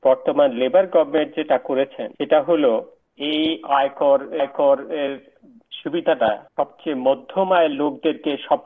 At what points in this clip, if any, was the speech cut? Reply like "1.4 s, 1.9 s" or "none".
2.1 s, 4.4 s, 6.5 s